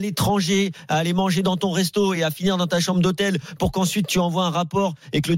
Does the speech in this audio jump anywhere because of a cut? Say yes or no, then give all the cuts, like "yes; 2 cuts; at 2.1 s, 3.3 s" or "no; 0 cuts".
no; 0 cuts